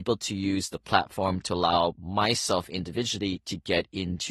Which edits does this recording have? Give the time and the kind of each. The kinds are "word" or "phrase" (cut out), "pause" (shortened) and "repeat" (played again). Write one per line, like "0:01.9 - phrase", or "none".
none